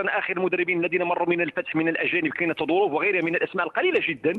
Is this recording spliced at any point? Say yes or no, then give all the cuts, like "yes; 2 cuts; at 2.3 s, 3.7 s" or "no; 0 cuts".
no; 0 cuts